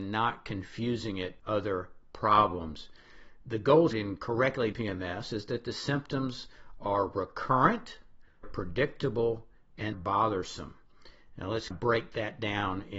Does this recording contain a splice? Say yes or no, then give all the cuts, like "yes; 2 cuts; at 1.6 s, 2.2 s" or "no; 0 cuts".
yes; 6 cuts; at 1.4 s, 3.9 s, 4.7 s, 8.4 s, 9.9 s, 11.7 s